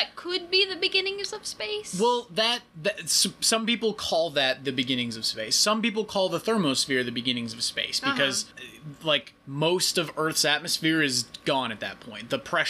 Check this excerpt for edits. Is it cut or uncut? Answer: cut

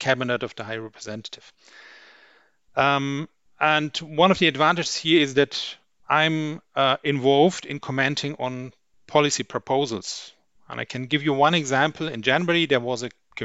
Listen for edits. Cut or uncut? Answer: uncut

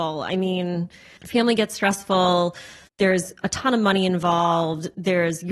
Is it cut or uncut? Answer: uncut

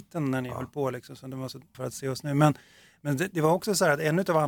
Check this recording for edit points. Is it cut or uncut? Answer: cut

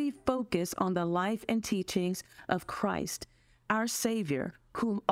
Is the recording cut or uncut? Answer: uncut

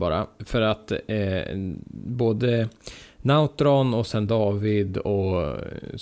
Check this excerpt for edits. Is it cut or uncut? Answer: uncut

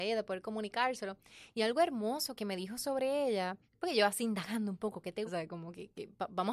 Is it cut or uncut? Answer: cut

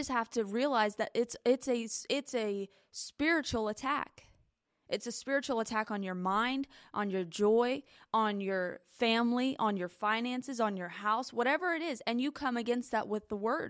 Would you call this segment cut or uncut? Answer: uncut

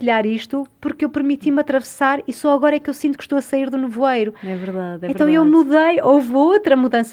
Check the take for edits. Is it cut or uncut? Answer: uncut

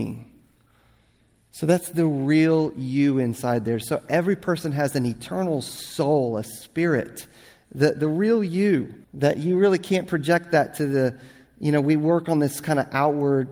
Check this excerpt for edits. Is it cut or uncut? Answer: cut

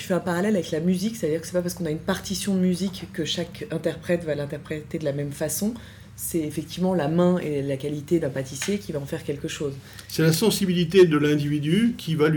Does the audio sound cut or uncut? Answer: uncut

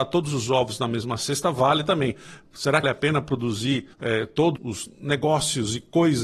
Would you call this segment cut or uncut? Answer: cut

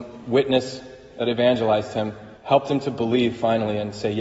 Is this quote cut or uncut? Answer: cut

